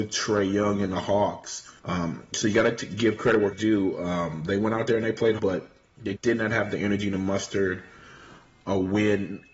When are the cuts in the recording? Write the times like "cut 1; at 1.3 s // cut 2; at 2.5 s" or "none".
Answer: cut 1; at 1.8 s // cut 2; at 3.5 s // cut 3; at 5.4 s // cut 4; at 6.1 s

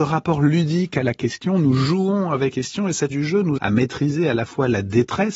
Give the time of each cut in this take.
cut 1; at 2.5 s // cut 2; at 3.1 s // cut 3; at 3.6 s

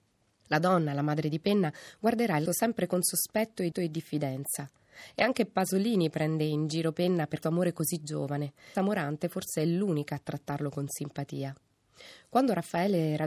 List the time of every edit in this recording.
cut 1; at 2.5 s // cut 2; at 3.7 s // cut 3; at 7.4 s // cut 4; at 8.7 s

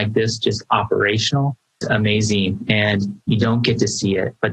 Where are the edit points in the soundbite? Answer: cut 1; at 1.8 s

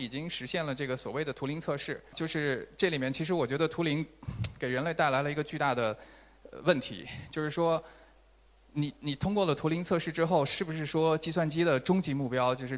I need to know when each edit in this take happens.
cut 1; at 2.1 s

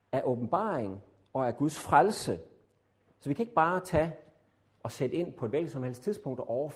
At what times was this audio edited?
none

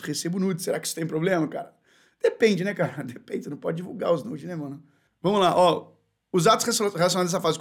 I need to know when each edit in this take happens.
none

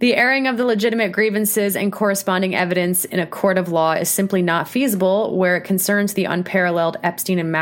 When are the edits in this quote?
none

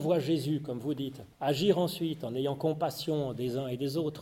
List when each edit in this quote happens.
cut 1; at 1.3 s

